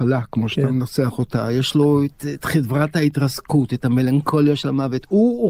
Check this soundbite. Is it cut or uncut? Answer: uncut